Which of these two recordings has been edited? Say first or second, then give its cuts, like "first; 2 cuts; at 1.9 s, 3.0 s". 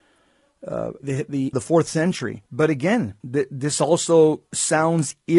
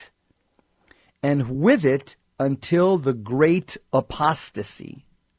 first; 4 cuts; at 1.0 s, 1.5 s, 2.5 s, 3.2 s